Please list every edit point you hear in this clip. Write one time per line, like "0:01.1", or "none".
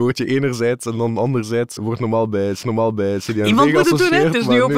0:01.8
0:02.6